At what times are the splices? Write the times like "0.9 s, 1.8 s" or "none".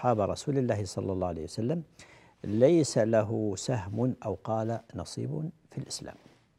none